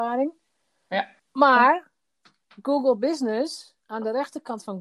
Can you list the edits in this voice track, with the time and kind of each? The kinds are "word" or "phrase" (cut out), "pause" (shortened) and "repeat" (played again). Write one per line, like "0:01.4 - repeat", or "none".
0:01.2 - pause
0:03.8 - pause